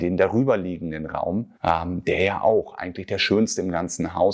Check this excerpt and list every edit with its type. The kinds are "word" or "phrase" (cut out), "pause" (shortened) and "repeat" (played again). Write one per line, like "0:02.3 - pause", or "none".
0:01.6 - pause